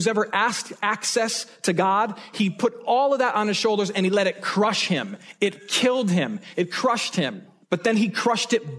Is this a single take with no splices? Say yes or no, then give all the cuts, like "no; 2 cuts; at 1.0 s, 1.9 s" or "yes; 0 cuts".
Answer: yes; 0 cuts